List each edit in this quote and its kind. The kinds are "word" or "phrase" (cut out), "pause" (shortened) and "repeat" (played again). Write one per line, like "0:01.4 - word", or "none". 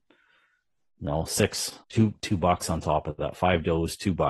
0:01.8 - pause